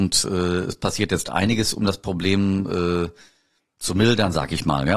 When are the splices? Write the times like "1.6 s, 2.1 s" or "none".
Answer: none